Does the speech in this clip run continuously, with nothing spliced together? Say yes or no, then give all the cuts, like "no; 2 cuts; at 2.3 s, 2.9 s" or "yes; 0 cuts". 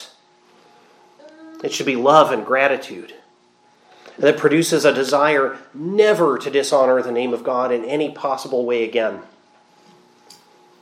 yes; 0 cuts